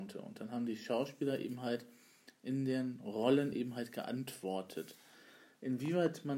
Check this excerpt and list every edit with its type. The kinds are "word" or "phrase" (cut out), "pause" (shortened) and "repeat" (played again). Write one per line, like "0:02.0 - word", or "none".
none